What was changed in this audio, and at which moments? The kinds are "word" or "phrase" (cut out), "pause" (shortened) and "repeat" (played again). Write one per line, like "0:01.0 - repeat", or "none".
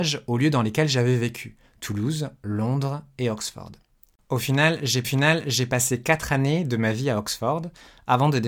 0:05.0 - repeat